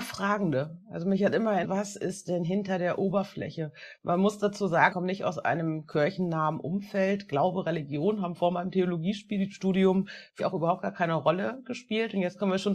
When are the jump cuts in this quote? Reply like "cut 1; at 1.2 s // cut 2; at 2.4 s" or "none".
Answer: cut 1; at 1.6 s // cut 2; at 4.9 s // cut 3; at 10.4 s